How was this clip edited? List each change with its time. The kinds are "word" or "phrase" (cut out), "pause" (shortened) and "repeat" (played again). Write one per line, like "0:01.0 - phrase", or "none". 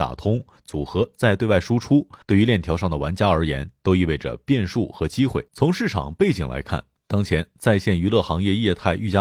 0:02.2 - pause
0:05.5 - pause